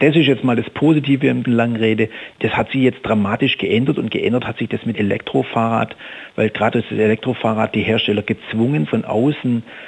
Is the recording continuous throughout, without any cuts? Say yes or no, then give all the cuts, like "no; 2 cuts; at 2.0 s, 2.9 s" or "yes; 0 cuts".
no; 4 cuts; at 1.5 s, 4.9 s, 6.7 s, 8.9 s